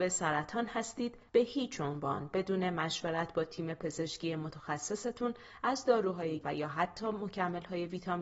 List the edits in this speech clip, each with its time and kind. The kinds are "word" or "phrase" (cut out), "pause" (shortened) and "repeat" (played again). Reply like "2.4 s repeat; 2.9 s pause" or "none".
6.4 s word